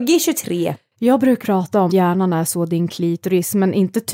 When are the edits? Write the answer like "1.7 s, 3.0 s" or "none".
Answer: 1.4 s, 1.9 s